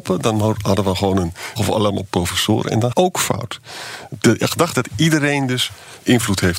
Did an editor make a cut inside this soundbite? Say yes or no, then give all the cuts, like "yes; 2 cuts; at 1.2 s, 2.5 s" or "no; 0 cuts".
yes; 3 cuts; at 1.6 s, 2.9 s, 4.7 s